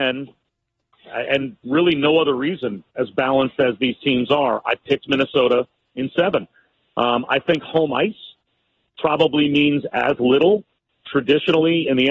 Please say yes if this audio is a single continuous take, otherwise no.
yes